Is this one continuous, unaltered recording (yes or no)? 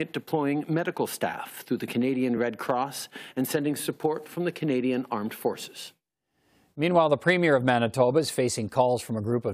yes